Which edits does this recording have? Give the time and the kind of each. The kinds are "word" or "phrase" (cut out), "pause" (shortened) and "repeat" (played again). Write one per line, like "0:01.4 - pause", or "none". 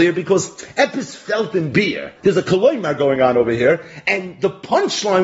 0:02.2 - pause